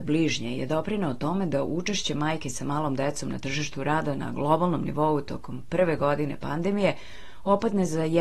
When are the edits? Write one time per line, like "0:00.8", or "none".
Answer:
none

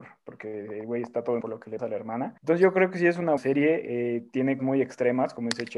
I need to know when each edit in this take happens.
0:01.4
0:01.8
0:02.4
0:03.4
0:04.6

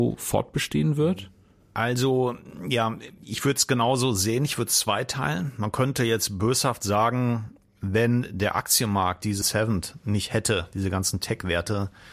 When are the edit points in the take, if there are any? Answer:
0:09.4

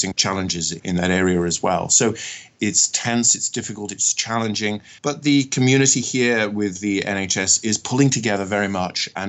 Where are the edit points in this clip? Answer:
0:05.0

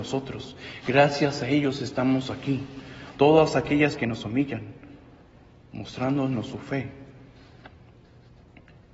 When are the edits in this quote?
0:04.0

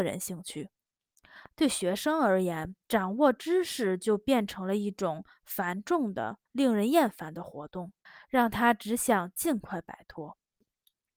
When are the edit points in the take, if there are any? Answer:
0:02.8
0:06.5
0:08.1

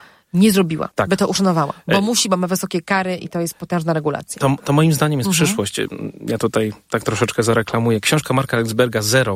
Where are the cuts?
0:00.9

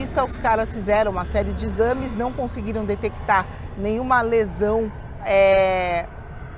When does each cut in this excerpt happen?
none

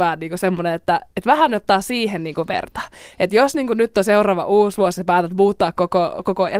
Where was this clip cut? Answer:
none

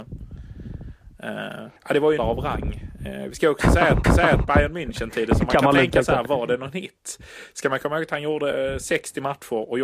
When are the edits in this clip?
0:01.8
0:02.2
0:04.0

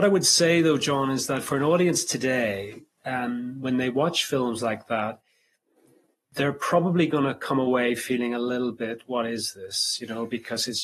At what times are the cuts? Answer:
none

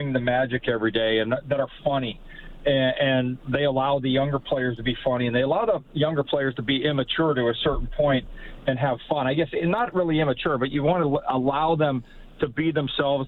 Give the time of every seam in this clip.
none

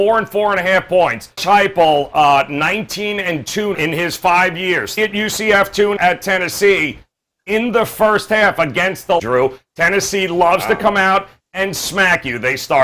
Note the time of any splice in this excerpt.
0:01.4
0:03.7
0:05.0
0:06.0
0:09.2

